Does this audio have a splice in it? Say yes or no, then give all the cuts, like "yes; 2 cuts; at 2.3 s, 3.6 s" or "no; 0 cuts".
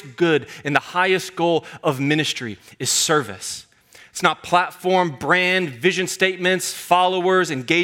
no; 0 cuts